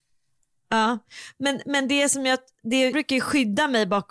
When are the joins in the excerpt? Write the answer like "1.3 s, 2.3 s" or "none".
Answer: 2.9 s